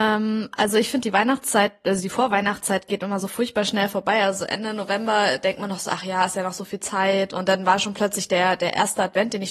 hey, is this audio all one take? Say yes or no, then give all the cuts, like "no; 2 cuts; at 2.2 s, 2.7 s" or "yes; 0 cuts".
yes; 0 cuts